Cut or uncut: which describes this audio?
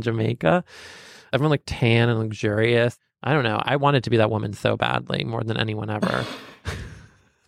uncut